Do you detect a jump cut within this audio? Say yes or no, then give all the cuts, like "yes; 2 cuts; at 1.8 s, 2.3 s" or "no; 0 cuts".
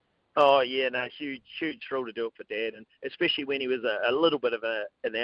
no; 0 cuts